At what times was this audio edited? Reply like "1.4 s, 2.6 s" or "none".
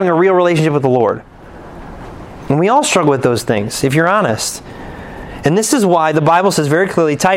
none